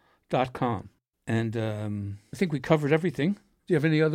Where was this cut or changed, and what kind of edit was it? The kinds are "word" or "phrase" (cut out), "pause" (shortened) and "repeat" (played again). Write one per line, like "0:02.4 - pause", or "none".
none

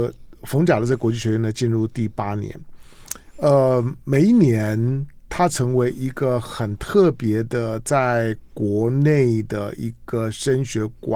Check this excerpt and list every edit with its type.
0:05.3 - word

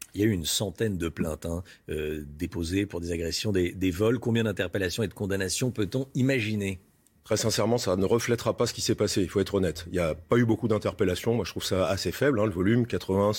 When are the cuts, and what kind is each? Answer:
none

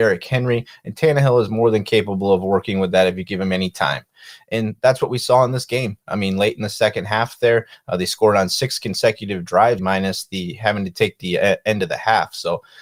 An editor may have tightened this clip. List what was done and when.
0:09.8 - word
0:11.2 - phrase

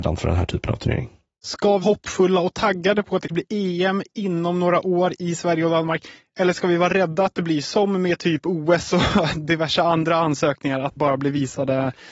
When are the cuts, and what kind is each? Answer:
0:01.8 - word
0:03.3 - word
0:11.0 - word

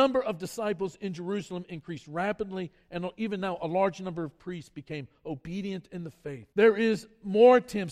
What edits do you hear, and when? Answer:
0:06.5 - pause

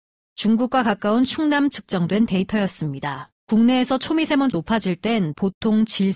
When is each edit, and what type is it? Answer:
0:01.7 - word
0:03.4 - pause
0:04.5 - word

